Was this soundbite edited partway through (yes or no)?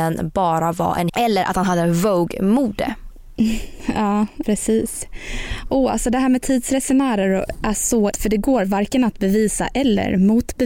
yes